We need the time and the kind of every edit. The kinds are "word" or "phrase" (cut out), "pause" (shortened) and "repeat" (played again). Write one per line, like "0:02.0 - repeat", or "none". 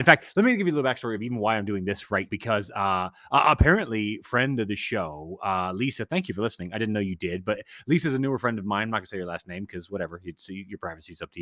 0:02.3 - word

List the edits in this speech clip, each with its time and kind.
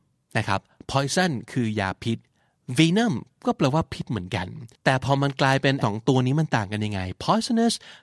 0:04.7 - pause
0:05.8 - word

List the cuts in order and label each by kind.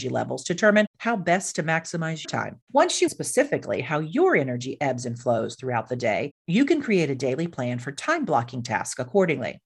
0:02.2 - word
0:02.6 - pause
0:03.1 - word

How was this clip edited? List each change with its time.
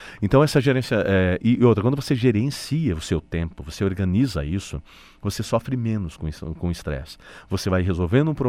none

